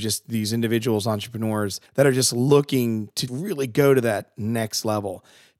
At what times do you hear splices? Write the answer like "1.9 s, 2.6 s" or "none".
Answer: 1.9 s, 3.3 s